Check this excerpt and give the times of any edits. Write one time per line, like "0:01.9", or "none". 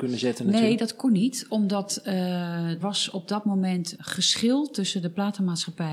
0:02.8
0:04.0

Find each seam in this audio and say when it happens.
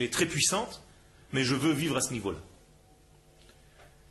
none

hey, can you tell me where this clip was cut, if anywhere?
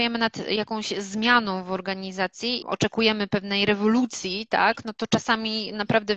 0:02.6

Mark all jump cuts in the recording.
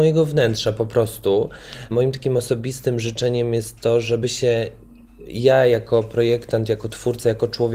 none

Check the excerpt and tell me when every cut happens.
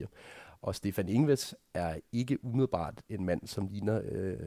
none

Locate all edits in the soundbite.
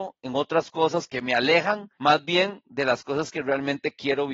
0:01.9

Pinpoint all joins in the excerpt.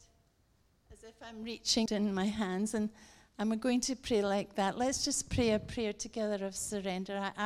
0:01.9

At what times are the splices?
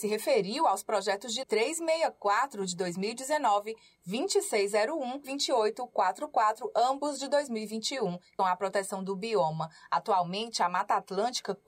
0:01.4
0:05.2
0:08.4

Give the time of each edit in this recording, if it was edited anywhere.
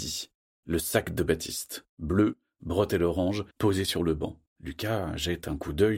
0:01.9
0:03.5
0:04.5

